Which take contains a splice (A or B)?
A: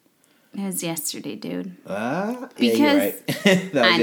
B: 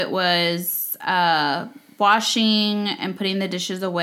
A